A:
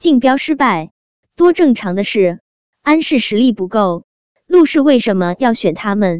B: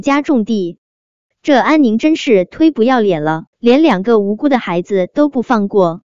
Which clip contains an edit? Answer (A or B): B